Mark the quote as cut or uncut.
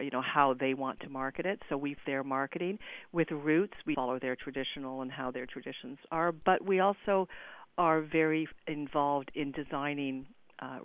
cut